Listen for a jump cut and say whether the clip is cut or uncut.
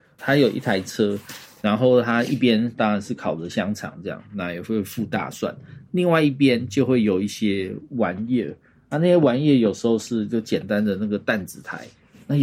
uncut